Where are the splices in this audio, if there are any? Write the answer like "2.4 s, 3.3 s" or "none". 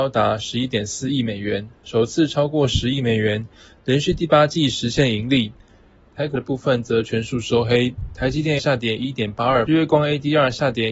6.4 s, 8.6 s, 9.7 s